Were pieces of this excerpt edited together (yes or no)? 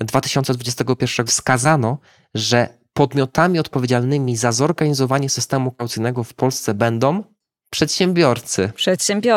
yes